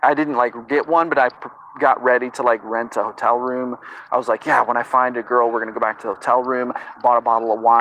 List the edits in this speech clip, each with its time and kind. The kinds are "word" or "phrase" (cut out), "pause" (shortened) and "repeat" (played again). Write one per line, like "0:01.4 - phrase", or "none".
none

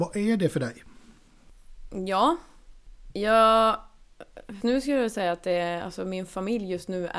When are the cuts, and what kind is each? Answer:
0:04.6 - word

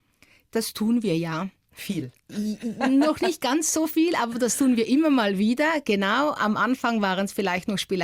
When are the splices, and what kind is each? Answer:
none

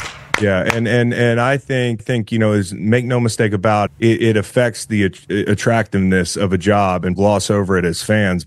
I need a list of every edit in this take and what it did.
0:01.1 - word
0:02.0 - word
0:03.9 - word
0:07.2 - word

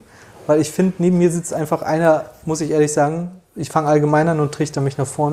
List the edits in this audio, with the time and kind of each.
none

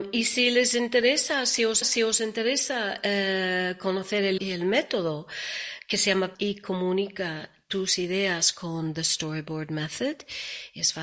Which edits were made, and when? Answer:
0:01.8 - repeat
0:04.4 - word
0:06.3 - word

